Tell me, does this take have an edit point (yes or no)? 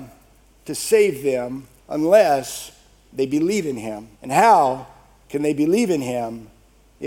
yes